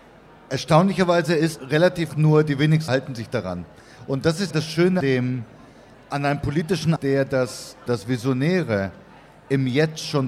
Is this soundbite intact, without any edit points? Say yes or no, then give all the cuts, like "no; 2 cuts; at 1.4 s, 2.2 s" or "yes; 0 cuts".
no; 8 cuts; at 1.6 s, 2.1 s, 2.9 s, 4.5 s, 5.0 s, 5.9 s, 7.0 s, 7.9 s